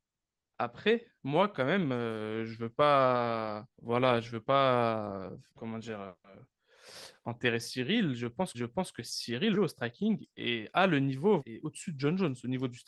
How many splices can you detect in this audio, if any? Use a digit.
5